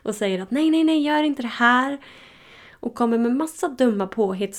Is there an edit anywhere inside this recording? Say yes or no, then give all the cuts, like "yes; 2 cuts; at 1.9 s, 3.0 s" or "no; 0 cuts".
no; 0 cuts